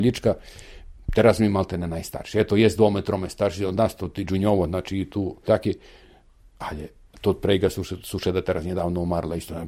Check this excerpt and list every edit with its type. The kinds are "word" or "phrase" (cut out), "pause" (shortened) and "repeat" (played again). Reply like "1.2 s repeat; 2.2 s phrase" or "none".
5.5 s phrase

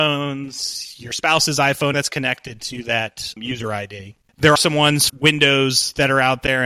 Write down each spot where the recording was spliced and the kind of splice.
1.9 s word; 3.4 s word; 4.6 s word; 5.1 s word

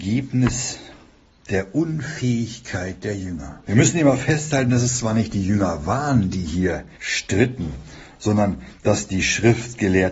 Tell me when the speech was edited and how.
3.6 s pause; 6.9 s pause

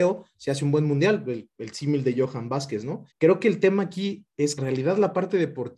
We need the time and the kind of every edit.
3.1 s pause; 4.6 s phrase

